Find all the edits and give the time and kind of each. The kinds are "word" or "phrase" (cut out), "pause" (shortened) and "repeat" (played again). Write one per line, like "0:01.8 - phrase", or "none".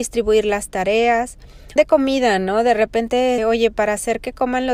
0:01.8 - phrase
0:03.4 - word
0:03.7 - word